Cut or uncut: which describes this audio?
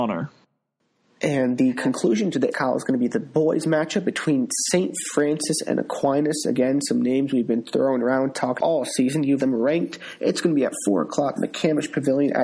cut